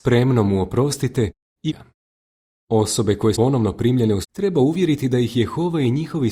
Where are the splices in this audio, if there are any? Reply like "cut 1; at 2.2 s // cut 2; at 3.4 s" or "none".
cut 1; at 1.7 s // cut 2; at 3.3 s // cut 3; at 4.2 s